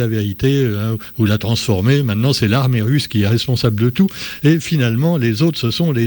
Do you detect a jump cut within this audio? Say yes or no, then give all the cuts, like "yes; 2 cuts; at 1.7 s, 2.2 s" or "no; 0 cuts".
no; 0 cuts